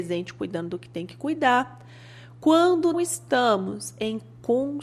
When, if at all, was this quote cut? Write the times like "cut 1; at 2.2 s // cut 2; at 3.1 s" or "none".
cut 1; at 2.9 s